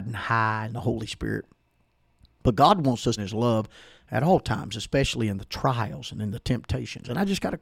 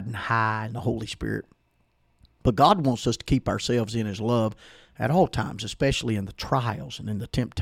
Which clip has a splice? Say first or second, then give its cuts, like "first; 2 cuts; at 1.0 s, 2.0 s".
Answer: first; 1 cut; at 3.2 s